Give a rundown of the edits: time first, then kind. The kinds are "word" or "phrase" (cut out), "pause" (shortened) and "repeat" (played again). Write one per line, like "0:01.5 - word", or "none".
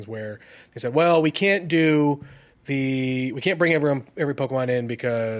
none